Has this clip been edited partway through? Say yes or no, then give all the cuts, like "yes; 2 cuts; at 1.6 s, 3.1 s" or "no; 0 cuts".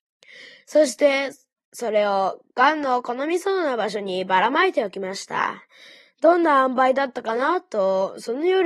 no; 0 cuts